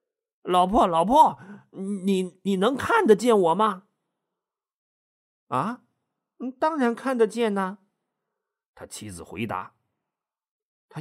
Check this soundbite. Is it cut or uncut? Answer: uncut